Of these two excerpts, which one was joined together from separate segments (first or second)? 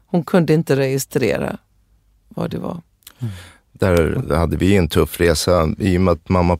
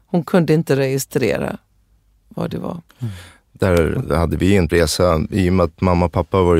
second